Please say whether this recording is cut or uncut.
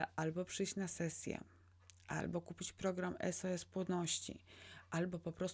uncut